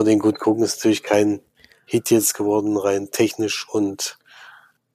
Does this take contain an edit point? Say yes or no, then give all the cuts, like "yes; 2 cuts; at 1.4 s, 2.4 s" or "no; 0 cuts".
no; 0 cuts